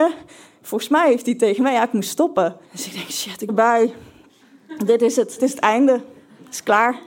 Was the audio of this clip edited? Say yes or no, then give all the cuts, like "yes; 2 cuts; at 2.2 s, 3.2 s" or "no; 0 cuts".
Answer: yes; 3 cuts; at 2.6 s, 3.5 s, 5.4 s